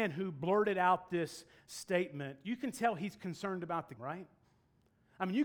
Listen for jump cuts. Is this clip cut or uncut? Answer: cut